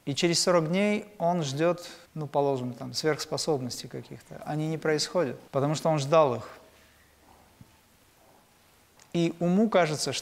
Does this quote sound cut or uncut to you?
cut